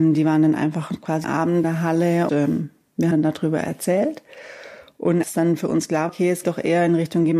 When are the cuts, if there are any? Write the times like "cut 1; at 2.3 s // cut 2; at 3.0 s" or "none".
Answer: cut 1; at 1.2 s // cut 2; at 1.6 s // cut 3; at 2.3 s // cut 4; at 3.1 s // cut 5; at 5.2 s // cut 6; at 6.1 s // cut 7; at 6.4 s